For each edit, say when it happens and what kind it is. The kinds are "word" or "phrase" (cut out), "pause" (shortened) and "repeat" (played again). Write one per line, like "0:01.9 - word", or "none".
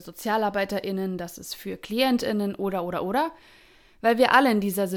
none

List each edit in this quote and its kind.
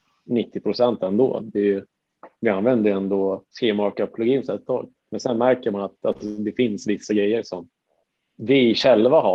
0:02.3 - pause
0:03.5 - pause
0:08.0 - pause

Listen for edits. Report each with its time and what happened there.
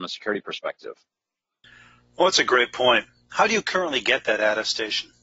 none

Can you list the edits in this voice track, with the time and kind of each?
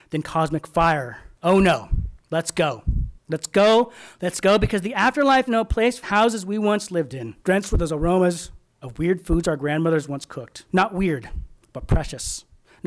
0:01.3 - pause
0:02.2 - pause
0:03.2 - pause
0:05.5 - word
0:06.0 - word
0:07.4 - pause
0:10.7 - pause

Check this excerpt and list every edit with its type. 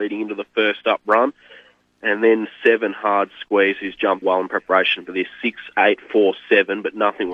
0:04.2 - word

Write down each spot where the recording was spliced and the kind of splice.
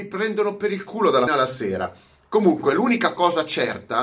0:01.3 - word

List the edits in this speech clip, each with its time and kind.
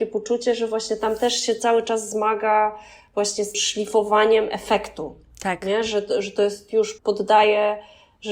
0:03.5 - word
0:07.0 - word

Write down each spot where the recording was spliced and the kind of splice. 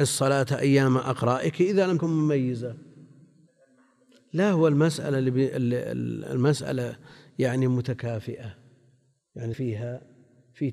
0:02.0 - word
0:09.5 - word

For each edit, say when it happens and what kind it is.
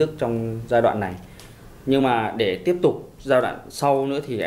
none

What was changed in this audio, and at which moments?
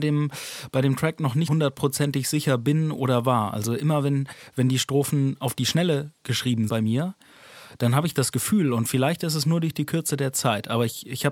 0:01.5 - word
0:06.7 - word

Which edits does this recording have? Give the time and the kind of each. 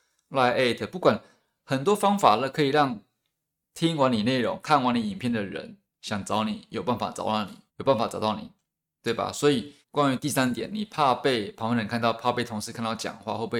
0:07.7 - pause
0:09.8 - pause

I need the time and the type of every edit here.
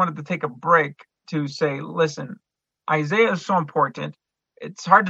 none

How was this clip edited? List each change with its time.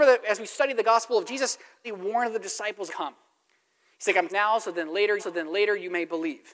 0:01.3 - word
0:01.8 - word
0:02.9 - phrase
0:04.3 - phrase
0:05.2 - repeat

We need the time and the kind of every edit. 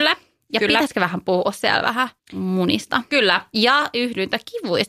0:02.2 - pause

